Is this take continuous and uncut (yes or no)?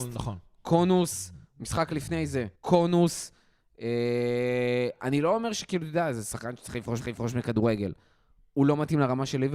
no